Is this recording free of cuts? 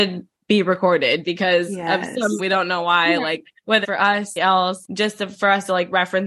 no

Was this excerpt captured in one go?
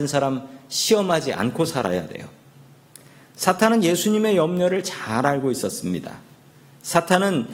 yes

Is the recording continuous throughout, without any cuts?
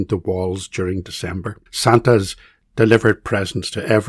no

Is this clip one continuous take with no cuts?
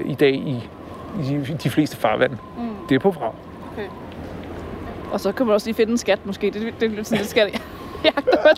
yes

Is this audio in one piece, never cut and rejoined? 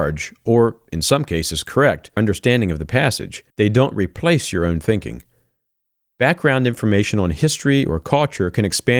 no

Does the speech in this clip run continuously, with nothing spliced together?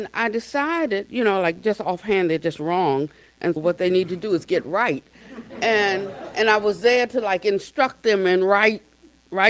no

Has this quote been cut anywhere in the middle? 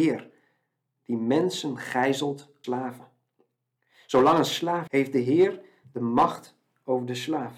yes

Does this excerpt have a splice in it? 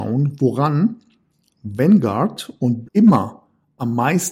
yes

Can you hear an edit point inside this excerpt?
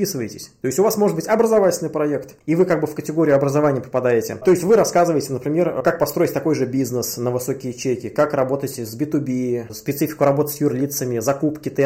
no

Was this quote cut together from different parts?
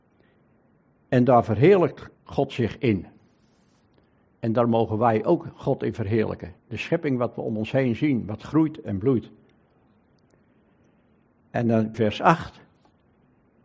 yes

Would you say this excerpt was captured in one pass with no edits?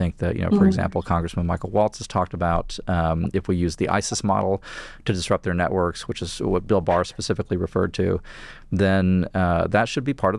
yes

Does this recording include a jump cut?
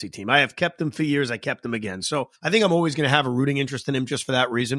yes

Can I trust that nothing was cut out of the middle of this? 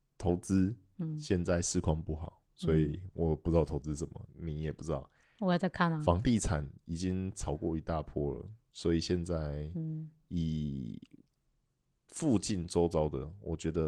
yes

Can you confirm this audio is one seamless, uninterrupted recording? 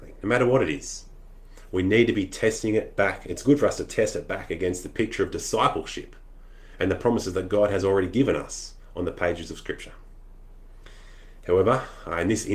yes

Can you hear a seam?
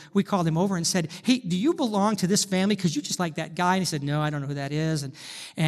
yes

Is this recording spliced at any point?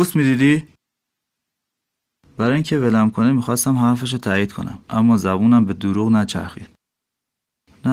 yes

